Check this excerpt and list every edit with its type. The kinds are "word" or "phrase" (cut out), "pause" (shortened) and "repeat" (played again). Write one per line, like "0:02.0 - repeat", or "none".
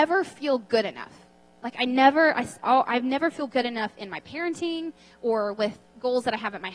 none